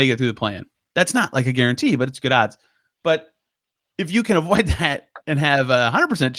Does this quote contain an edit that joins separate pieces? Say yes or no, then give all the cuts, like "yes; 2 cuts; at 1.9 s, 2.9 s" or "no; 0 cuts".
no; 0 cuts